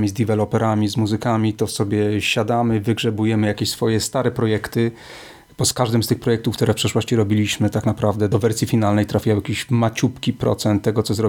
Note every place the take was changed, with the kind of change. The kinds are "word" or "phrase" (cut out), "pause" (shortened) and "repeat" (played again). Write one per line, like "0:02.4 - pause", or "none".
none